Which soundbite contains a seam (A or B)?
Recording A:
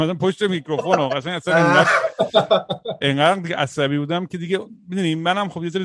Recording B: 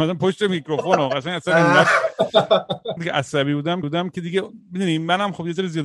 B